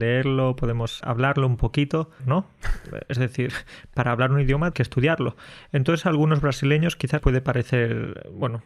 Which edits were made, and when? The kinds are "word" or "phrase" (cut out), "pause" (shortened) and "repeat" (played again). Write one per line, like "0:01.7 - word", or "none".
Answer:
0:01.0 - word
0:02.2 - word
0:04.7 - word
0:07.2 - word